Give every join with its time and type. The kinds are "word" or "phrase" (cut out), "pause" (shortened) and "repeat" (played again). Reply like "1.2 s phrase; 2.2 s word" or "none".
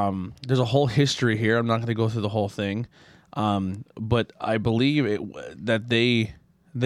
none